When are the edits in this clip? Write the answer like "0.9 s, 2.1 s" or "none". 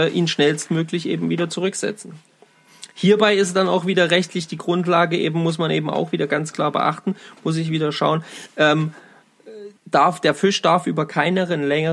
9.8 s